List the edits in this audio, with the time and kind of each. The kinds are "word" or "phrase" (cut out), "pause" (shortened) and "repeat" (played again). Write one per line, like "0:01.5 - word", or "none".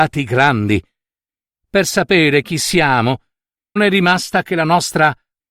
0:03.8 - word